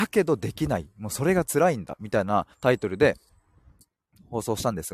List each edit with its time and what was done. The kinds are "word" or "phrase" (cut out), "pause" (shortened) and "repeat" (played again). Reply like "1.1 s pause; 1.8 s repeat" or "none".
2.5 s pause